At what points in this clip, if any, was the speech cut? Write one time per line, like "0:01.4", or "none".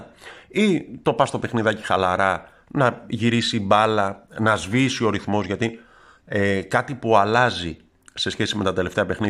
none